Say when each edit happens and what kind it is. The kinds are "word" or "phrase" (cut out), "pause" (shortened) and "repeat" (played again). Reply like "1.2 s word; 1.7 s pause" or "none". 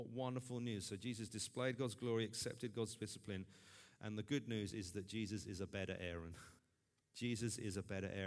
6.6 s pause